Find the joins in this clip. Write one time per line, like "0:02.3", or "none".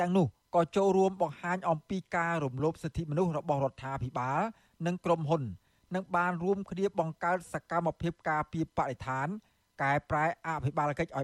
none